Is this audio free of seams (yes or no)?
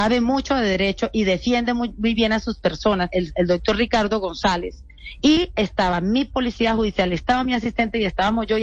yes